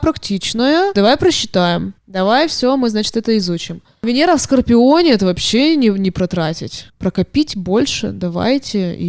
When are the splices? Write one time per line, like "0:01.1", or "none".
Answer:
0:02.0
0:06.9